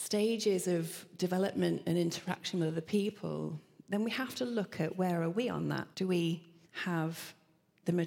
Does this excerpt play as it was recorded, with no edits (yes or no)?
no